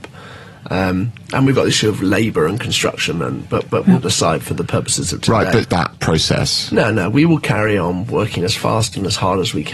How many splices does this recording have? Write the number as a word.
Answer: three